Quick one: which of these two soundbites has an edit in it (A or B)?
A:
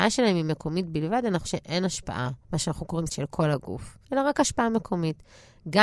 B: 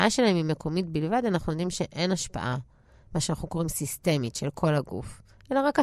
A